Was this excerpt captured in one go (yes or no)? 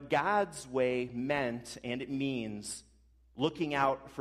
yes